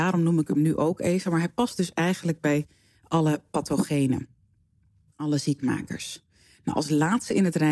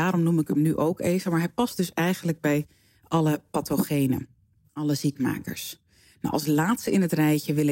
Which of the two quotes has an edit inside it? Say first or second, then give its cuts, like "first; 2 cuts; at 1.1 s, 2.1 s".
second; 1 cut; at 4.6 s